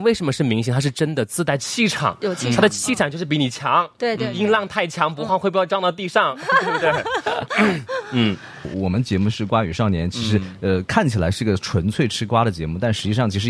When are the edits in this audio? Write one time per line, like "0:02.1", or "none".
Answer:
none